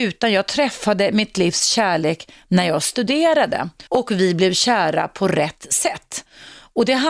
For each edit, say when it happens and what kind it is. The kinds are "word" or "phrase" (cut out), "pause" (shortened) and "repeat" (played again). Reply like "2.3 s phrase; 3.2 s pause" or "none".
3.9 s pause